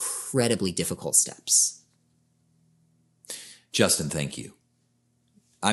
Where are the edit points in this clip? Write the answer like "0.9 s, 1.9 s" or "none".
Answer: none